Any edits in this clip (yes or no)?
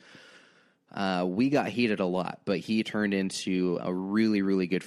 yes